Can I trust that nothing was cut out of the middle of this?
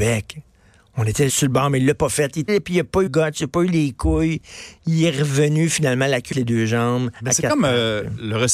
no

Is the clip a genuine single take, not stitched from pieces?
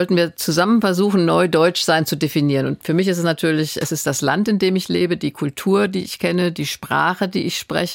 yes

